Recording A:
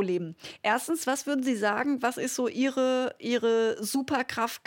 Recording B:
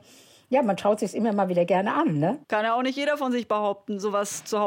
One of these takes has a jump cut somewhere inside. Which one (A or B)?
B